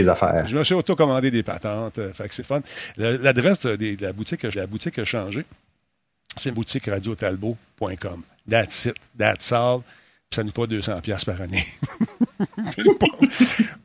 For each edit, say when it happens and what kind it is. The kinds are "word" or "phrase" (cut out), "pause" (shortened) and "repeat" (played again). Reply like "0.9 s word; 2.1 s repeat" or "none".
2.4 s word; 4.5 s repeat; 6.5 s phrase; 10.5 s word